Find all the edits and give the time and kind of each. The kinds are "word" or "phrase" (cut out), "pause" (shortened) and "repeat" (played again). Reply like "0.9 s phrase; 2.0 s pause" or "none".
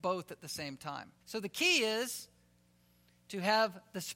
1.2 s pause